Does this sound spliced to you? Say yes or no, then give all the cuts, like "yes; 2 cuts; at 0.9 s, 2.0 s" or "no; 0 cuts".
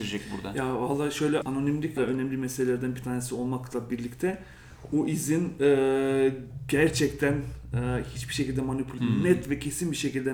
yes; 3 cuts; at 1.4 s, 2.0 s, 9.0 s